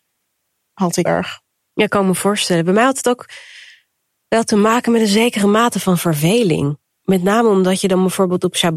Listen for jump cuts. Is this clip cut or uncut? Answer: cut